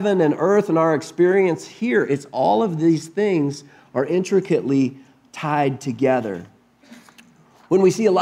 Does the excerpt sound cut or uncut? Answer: uncut